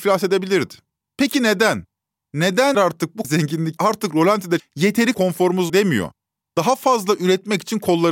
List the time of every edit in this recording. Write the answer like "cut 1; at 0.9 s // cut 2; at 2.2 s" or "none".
cut 1; at 2.7 s // cut 2; at 3.2 s // cut 3; at 3.8 s // cut 4; at 4.6 s // cut 5; at 5.1 s // cut 6; at 5.7 s